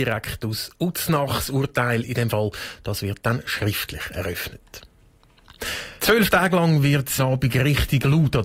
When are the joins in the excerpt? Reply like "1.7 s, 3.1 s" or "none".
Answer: 6.0 s, 7.2 s